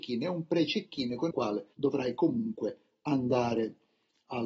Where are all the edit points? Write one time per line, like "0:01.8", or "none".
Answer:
0:01.3
0:01.7

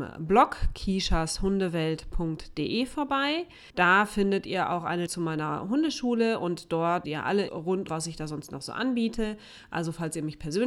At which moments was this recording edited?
0:03.7
0:05.1
0:07.0
0:07.5
0:07.9

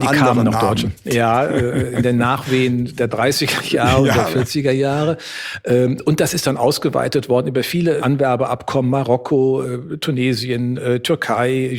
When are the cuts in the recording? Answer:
0:08.0

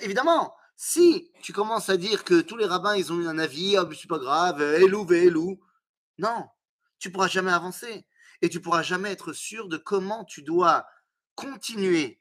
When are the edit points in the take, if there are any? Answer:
none

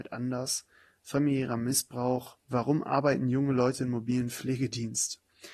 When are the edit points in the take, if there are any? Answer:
0:02.4

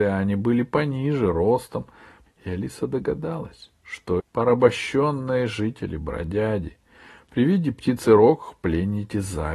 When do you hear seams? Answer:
0:02.3
0:04.2

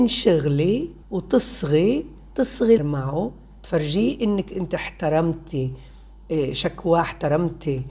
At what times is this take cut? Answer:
0:01.0
0:02.8

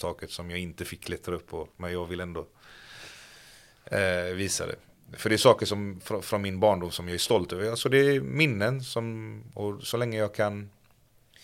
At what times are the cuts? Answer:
none

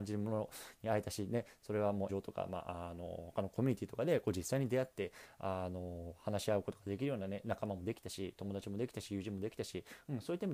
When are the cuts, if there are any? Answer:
0:02.1

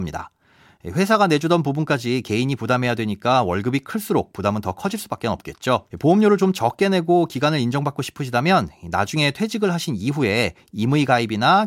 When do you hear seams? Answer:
0:05.9

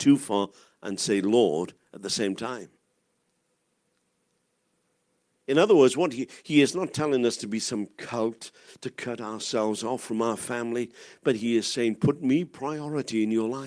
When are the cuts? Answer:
none

